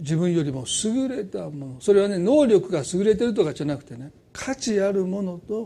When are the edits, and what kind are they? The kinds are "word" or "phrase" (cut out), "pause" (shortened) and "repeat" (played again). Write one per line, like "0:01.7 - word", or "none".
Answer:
0:04.2 - pause